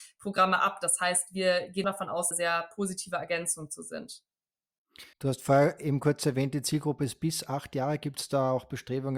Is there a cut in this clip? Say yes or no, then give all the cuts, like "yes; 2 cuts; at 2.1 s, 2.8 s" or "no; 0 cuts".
yes; 3 cuts; at 1.8 s, 2.3 s, 5.1 s